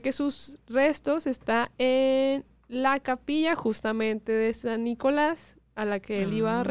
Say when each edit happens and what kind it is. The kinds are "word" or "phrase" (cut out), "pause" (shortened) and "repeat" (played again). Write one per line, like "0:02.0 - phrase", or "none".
none